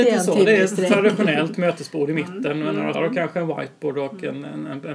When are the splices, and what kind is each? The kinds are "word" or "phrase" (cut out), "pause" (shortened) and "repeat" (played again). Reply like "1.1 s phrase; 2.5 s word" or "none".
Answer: 2.9 s word